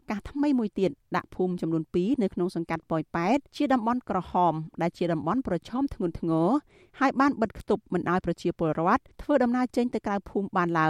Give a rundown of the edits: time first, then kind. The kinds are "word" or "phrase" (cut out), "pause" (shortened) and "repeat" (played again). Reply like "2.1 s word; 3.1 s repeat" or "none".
3.5 s pause; 9.1 s pause